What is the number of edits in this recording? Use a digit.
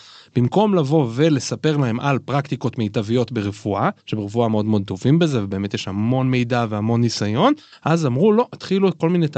2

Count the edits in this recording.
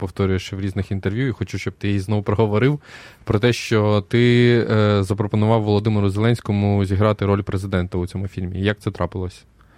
0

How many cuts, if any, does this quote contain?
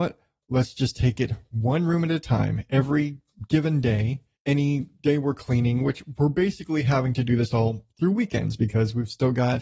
1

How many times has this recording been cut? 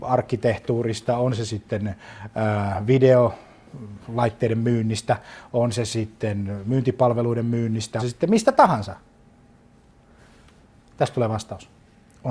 1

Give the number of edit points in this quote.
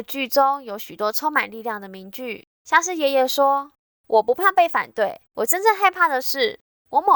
2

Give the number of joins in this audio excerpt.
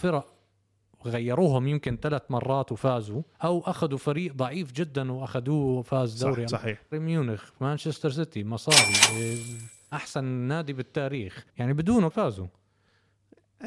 6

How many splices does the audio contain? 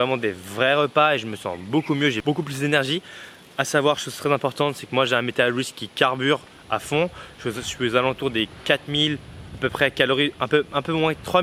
0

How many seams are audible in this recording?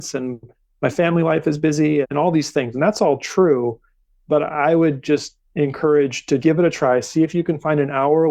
3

